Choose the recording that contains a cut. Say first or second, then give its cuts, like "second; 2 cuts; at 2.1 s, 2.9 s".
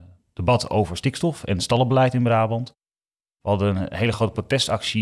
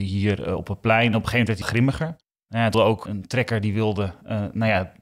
second; 4 cuts; at 1.6 s, 2.3 s, 2.7 s, 3.1 s